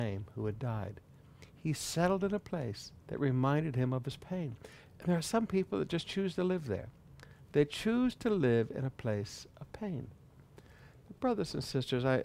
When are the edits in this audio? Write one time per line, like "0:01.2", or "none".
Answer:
0:03.0